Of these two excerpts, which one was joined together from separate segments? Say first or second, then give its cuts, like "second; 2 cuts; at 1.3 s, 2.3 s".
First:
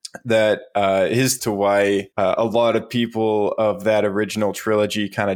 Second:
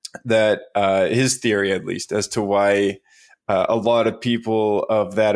first; 2 cuts; at 1.4 s, 2.1 s